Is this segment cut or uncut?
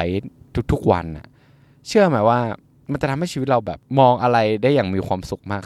uncut